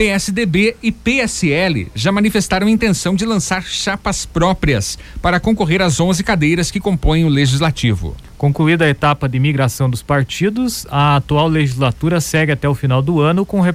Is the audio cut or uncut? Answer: uncut